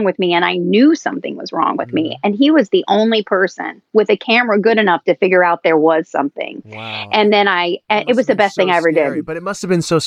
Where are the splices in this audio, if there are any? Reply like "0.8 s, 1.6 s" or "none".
7.8 s